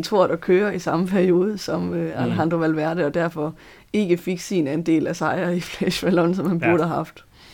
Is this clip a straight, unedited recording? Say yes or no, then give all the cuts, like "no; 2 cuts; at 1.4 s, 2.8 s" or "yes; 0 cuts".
yes; 0 cuts